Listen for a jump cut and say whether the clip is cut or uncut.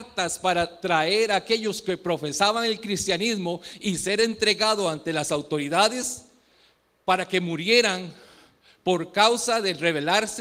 uncut